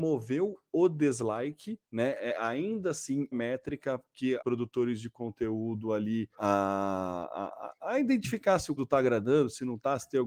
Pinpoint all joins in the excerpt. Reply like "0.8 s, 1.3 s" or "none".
1.8 s, 3.3 s, 4.4 s, 6.3 s, 8.8 s